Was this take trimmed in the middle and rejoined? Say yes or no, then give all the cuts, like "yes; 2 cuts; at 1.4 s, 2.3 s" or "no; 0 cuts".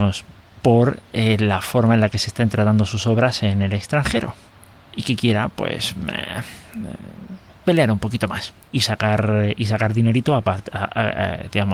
yes; 1 cut; at 8.7 s